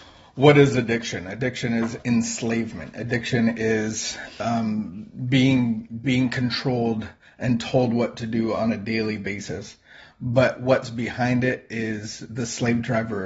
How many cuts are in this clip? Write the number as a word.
zero